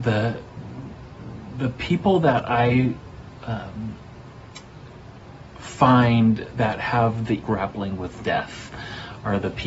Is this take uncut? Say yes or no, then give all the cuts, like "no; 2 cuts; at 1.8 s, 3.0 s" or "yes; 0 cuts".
no; 1 cut; at 7.4 s